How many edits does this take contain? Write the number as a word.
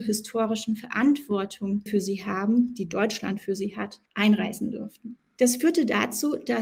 two